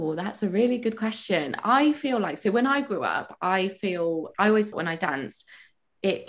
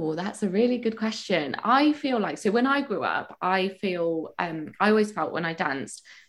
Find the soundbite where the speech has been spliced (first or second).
first